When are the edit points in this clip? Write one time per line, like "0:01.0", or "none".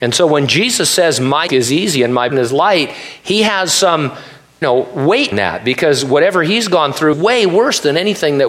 0:01.5
0:02.3
0:04.6
0:05.3
0:07.1